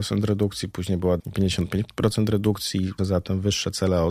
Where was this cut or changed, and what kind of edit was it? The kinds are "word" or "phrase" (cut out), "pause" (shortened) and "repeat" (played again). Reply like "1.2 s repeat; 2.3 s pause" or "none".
1.2 s word; 3.0 s word